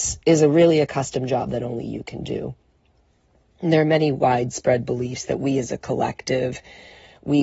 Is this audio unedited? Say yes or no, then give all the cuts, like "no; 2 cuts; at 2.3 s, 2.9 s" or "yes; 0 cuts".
yes; 0 cuts